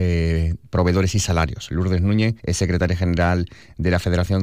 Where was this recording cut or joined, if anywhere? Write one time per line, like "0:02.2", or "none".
0:02.4